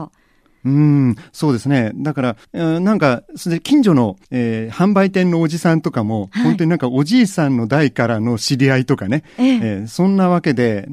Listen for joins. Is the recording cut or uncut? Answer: cut